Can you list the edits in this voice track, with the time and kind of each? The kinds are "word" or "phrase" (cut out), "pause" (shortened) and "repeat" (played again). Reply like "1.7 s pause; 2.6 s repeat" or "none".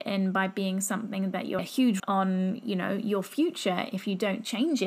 1.6 s phrase; 2.0 s word